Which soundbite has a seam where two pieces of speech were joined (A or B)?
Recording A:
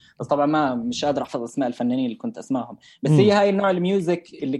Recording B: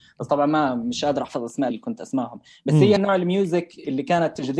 B